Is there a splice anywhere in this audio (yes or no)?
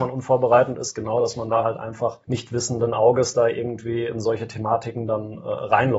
yes